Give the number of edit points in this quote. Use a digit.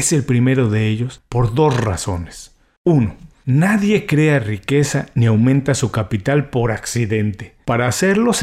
0